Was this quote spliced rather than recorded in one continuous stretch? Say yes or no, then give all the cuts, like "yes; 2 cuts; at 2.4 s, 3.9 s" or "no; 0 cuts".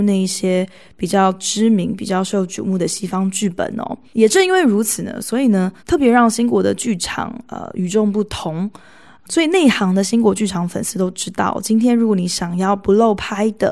yes; 2 cuts; at 4.1 s, 5.8 s